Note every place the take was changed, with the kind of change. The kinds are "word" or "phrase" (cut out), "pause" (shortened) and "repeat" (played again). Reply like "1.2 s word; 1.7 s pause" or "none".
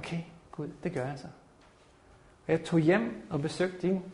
none